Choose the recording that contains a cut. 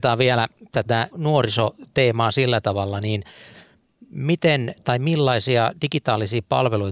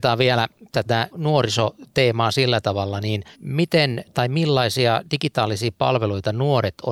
second; 1 cut; at 3.3 s

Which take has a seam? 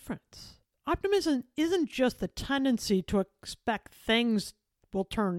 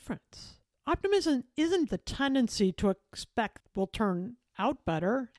second; 2 cuts; at 1.9 s, 3.6 s

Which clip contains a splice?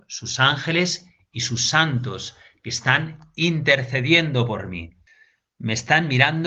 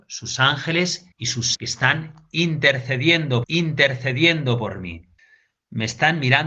second; 3 cuts; at 1.1 s, 1.5 s, 3.4 s

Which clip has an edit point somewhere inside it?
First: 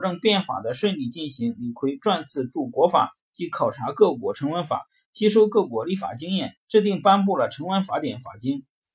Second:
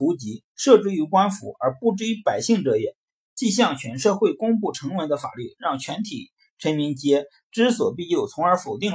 first; 1 cut; at 6.6 s

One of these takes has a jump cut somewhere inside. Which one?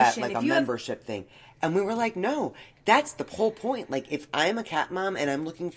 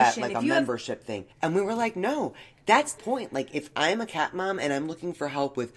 second; 2 cuts; at 1.3 s, 3.0 s

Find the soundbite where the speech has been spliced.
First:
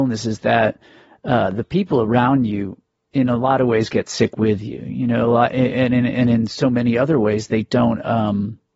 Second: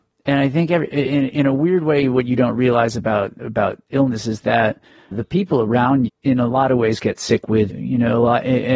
second; 3 cuts; at 5.1 s, 6.1 s, 7.7 s

